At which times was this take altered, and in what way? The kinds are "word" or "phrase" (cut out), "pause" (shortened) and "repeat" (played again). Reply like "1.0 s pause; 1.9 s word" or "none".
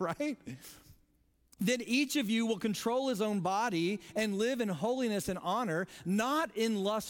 none

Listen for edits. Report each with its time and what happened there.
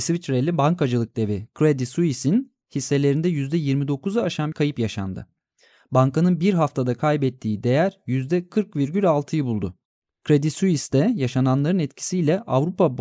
4.5 s word

